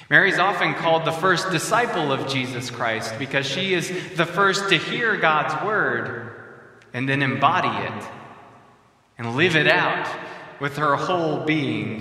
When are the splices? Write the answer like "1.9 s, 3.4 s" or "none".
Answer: none